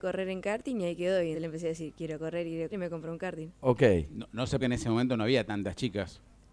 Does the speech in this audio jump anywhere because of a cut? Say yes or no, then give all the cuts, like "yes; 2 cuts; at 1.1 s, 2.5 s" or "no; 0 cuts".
yes; 4 cuts; at 1.3 s, 2.7 s, 3.5 s, 4.6 s